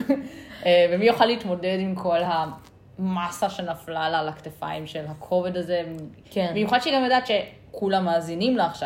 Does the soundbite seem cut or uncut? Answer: uncut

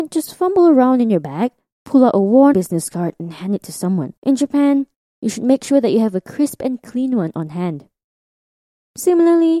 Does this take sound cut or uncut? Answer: cut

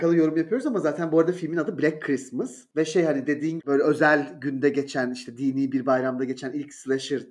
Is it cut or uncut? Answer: cut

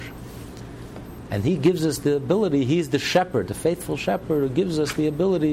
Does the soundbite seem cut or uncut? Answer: uncut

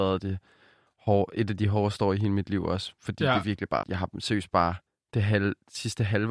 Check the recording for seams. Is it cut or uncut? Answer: cut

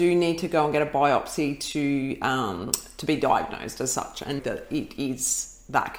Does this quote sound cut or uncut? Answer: cut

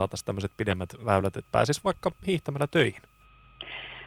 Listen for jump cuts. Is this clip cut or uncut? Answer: uncut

